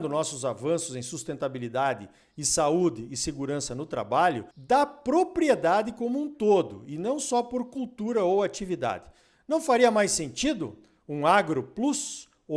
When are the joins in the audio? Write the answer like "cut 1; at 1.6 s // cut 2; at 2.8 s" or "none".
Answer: cut 1; at 4.5 s